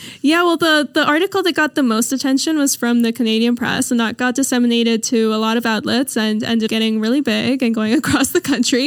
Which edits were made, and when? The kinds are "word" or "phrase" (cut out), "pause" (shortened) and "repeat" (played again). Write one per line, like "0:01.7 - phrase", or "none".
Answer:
0:06.7 - word